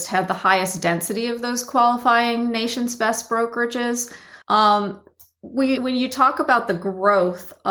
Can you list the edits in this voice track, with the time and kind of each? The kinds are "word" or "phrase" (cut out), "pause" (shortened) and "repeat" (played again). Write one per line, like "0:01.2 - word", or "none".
0:04.4 - pause
0:05.8 - word